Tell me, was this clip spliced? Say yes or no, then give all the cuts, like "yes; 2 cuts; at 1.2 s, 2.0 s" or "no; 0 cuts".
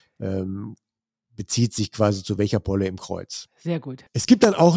no; 0 cuts